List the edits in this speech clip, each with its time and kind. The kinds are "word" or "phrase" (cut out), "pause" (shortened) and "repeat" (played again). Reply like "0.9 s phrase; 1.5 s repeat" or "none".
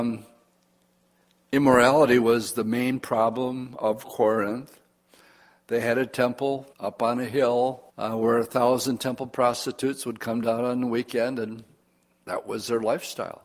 6.7 s pause; 7.9 s pause